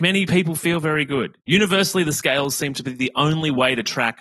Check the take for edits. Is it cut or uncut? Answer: uncut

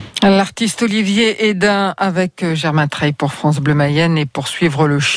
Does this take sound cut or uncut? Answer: uncut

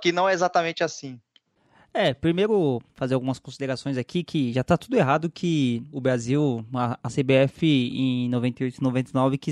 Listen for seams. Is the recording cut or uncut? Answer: uncut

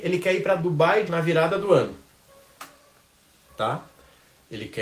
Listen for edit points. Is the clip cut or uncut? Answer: cut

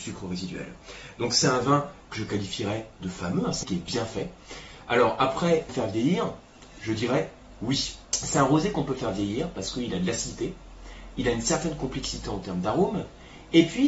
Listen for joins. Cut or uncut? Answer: cut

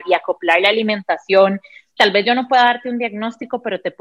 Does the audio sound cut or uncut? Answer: cut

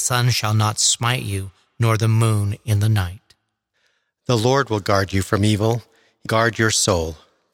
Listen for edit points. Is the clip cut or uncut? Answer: cut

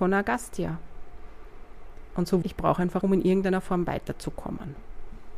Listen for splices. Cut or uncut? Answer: cut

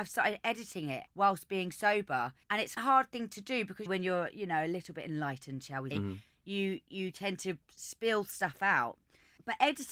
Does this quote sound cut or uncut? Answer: cut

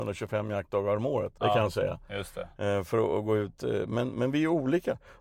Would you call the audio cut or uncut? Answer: cut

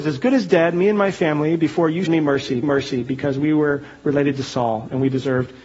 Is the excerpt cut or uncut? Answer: cut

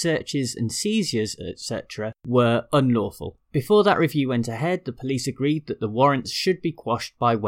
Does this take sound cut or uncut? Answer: cut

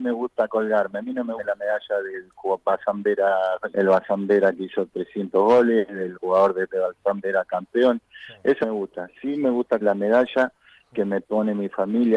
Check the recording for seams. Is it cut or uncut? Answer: cut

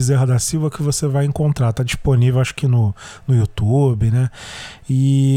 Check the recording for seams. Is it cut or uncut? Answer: uncut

